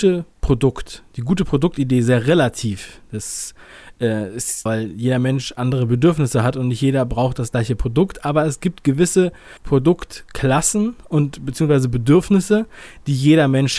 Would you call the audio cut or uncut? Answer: cut